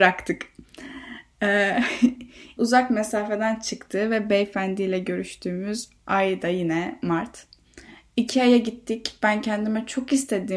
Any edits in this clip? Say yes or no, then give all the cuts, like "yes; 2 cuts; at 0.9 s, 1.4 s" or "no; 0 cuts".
yes; 1 cut; at 2.6 s